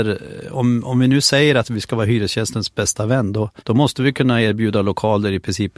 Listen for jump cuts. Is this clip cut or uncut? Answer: cut